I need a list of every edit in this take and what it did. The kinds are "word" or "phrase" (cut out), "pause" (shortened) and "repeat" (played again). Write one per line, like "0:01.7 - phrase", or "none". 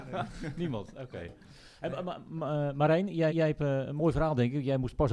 0:03.3 - repeat